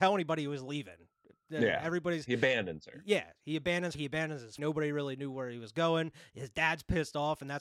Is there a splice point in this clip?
yes; 2 cuts; at 3.9 s, 4.6 s

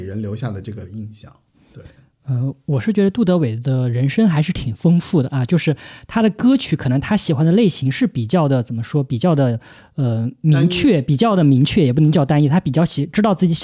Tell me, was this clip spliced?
no; 0 cuts

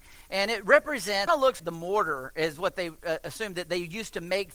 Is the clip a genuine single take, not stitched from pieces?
no; 2 cuts; at 1.3 s, 1.6 s

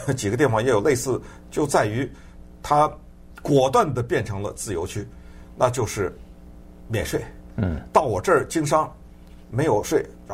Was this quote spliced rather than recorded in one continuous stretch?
no; 0 cuts

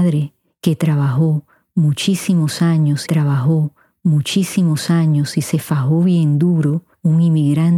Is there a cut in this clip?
yes; 1 cut; at 3.1 s

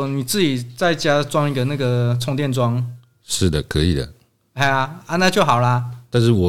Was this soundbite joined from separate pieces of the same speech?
no; 0 cuts

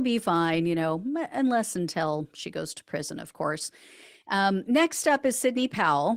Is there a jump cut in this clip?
no; 0 cuts

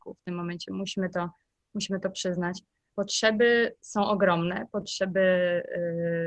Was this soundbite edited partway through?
no; 0 cuts

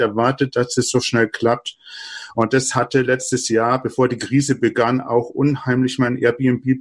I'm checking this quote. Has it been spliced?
no; 0 cuts

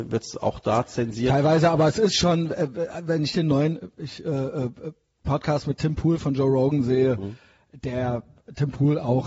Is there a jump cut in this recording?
no; 0 cuts

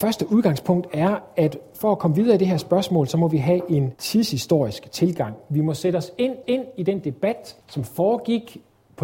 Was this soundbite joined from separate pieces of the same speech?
yes; 3 cuts; at 4.0 s, 6.4 s, 7.6 s

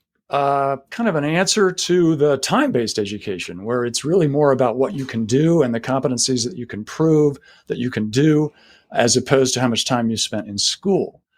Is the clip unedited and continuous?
yes; 0 cuts

